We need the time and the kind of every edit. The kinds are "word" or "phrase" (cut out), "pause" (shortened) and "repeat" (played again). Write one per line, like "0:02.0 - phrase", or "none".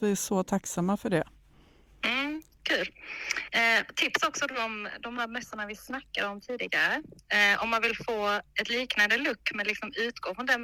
none